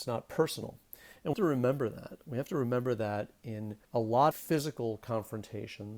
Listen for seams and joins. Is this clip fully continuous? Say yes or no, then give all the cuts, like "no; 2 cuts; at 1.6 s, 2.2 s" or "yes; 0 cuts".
no; 3 cuts; at 1.3 s, 3.8 s, 4.3 s